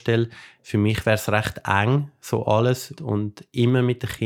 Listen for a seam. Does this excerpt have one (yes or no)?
yes